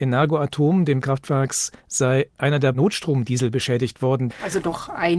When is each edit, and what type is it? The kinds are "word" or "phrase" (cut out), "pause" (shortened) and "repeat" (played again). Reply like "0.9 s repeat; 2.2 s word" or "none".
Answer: 1.0 s phrase; 1.8 s pause